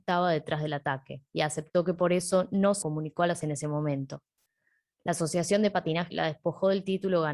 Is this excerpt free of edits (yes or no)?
no